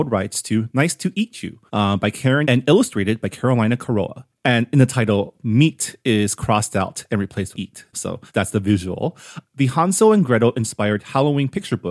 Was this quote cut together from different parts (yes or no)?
yes